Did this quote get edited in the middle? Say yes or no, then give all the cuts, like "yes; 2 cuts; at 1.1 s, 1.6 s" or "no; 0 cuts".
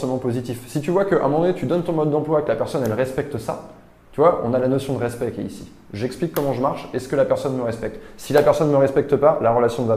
no; 0 cuts